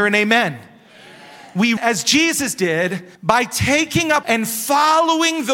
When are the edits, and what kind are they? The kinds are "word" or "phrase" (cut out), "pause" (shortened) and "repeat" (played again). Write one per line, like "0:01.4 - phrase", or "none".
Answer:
0:01.8 - word
0:03.1 - pause
0:04.2 - phrase